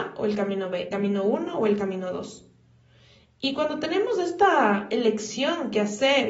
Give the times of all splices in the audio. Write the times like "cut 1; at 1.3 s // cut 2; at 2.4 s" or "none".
cut 1; at 0.9 s